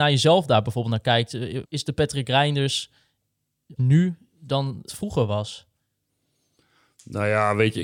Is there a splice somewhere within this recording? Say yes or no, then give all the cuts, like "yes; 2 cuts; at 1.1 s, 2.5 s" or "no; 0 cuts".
yes; 3 cuts; at 1.6 s, 3.8 s, 4.9 s